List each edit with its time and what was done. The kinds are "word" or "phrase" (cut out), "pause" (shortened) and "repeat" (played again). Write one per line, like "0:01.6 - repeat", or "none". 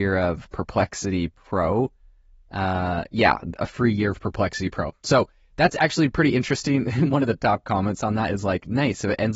none